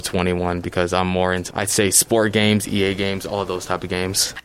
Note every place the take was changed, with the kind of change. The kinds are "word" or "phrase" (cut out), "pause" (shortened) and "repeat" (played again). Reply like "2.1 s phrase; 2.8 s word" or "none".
1.5 s word